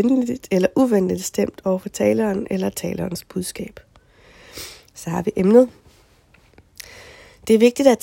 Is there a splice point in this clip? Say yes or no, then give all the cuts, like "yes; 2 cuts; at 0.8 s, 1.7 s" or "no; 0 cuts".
no; 0 cuts